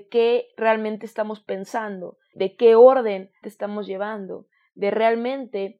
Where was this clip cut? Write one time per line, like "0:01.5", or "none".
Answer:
0:02.3
0:03.4